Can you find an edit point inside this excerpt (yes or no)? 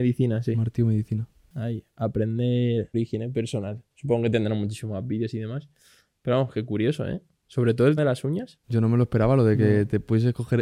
yes